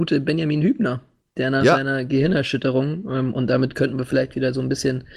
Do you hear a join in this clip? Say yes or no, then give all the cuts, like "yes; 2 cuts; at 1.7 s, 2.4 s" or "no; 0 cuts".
no; 0 cuts